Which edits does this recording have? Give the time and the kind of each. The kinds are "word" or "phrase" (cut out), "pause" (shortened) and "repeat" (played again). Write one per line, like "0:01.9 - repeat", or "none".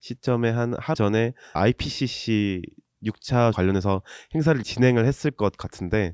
0:00.9 - word
0:01.6 - word
0:03.5 - word
0:04.6 - word

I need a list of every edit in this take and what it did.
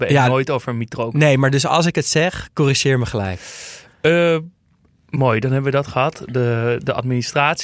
none

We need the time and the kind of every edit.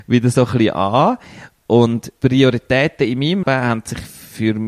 0:02.2 - word
0:03.4 - word

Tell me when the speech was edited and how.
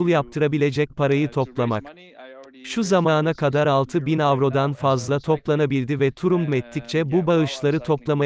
0:06.5 - word

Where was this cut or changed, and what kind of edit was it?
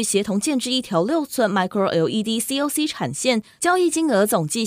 none

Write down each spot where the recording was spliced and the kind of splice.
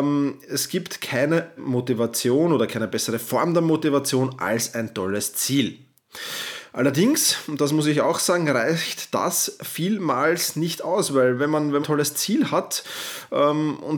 0:01.6 - word
0:11.8 - word

